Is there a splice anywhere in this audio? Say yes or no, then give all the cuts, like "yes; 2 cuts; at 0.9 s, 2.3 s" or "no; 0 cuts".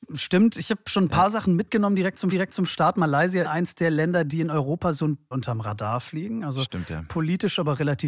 yes; 3 cuts; at 2.3 s, 3.4 s, 5.3 s